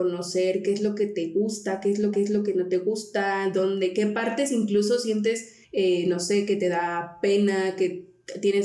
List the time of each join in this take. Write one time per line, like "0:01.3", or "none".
0:02.1
0:05.6